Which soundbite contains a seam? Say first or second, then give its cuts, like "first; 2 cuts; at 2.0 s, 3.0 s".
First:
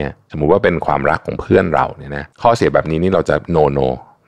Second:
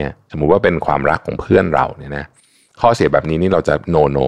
first; 1 cut; at 2.3 s